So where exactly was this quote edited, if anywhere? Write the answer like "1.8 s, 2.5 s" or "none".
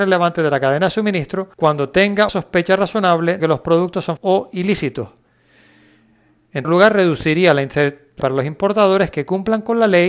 1.5 s, 2.3 s, 3.4 s, 4.2 s, 6.6 s, 8.2 s

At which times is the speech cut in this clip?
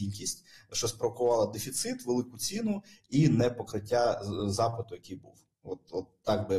none

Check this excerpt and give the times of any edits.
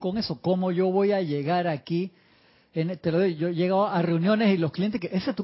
none

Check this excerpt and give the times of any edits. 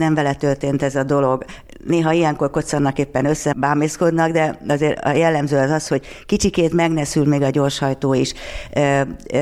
3.5 s

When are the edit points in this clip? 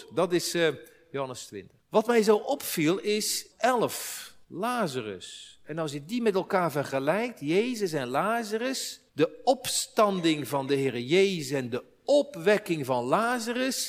1.8 s, 3.5 s, 4.4 s, 9.1 s

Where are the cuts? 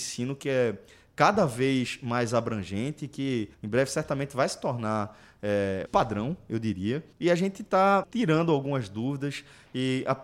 3.5 s, 5.9 s, 7.1 s, 8.0 s

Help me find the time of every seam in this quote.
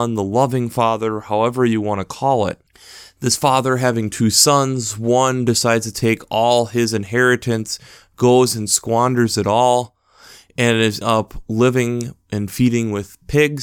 11.0 s

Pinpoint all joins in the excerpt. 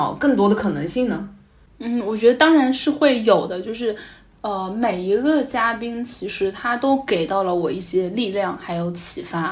none

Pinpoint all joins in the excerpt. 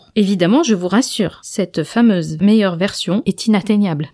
none

